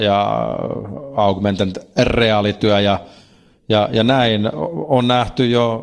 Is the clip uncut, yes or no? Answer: yes